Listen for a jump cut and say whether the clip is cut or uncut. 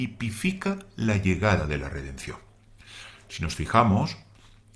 uncut